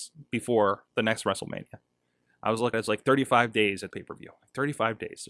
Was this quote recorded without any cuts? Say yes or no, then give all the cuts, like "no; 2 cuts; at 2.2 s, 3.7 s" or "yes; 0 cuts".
no; 2 cuts; at 2.7 s, 3.9 s